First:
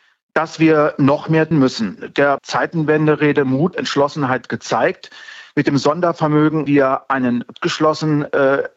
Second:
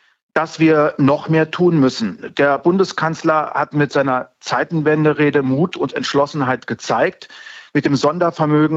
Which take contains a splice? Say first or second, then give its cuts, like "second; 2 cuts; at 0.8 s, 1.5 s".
first; 5 cuts; at 1.5 s, 2.4 s, 3.7 s, 6.7 s, 7.5 s